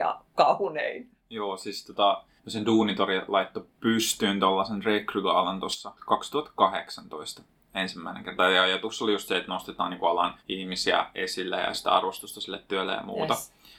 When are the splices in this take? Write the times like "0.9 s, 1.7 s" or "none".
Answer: 2.4 s, 3.7 s, 6.0 s, 10.4 s